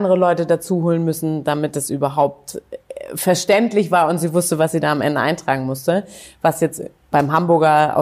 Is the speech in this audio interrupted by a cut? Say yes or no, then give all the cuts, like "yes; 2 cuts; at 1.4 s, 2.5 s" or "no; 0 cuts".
no; 0 cuts